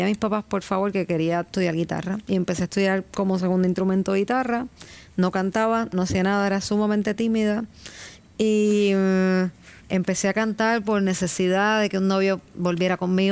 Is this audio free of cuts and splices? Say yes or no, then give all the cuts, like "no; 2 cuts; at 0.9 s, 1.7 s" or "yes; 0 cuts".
no; 1 cut; at 9.8 s